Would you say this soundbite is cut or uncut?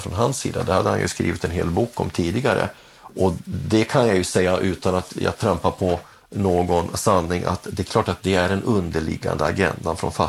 uncut